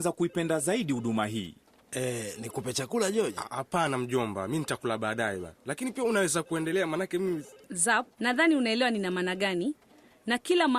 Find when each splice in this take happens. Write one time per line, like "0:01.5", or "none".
0:08.1